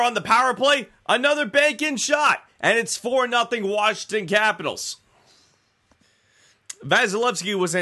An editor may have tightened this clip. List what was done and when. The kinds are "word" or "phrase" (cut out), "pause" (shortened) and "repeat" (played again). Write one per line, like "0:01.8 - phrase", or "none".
none